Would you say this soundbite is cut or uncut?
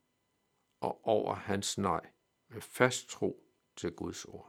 uncut